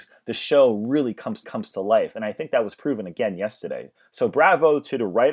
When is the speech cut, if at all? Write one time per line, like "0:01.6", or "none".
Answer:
0:01.4